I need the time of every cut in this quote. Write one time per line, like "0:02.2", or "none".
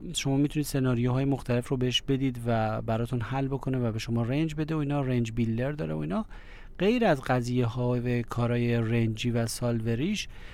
none